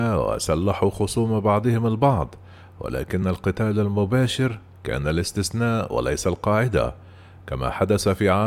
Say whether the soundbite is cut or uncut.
uncut